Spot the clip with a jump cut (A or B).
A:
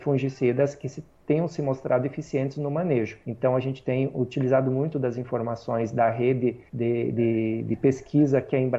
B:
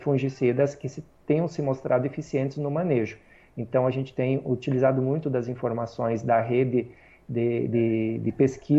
A